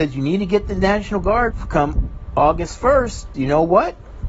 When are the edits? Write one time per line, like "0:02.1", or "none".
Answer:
0:01.5
0:03.3